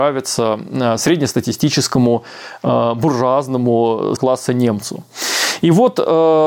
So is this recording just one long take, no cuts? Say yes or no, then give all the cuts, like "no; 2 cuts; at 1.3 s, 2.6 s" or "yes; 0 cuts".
no; 1 cut; at 4.2 s